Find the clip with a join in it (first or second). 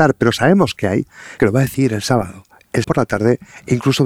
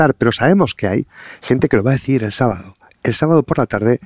first